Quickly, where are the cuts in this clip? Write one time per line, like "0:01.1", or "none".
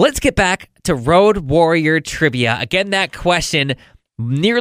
none